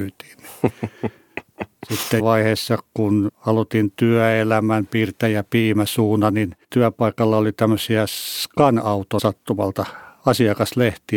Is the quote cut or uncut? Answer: cut